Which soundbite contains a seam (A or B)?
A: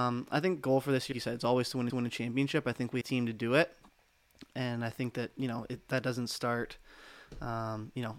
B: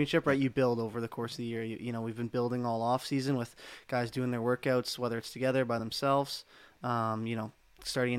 A